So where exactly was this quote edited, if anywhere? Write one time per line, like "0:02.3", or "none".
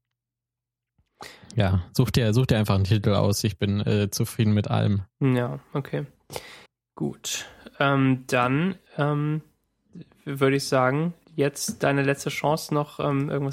0:05.1
0:06.7
0:08.9
0:11.2

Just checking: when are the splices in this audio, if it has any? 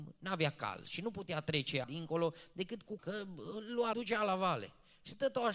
0:01.8
0:03.0
0:03.9

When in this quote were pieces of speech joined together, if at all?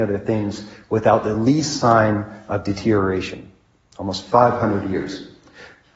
none

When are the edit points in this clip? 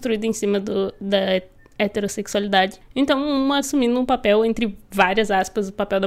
0:03.6

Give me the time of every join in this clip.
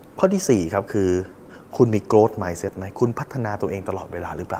none

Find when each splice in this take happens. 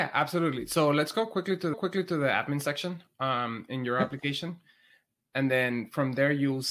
0:01.7

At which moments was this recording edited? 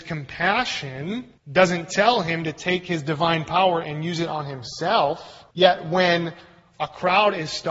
0:01.4
0:05.5

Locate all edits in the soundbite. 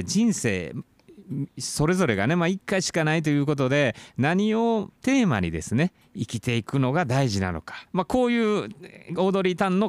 0:05.0
0:07.9

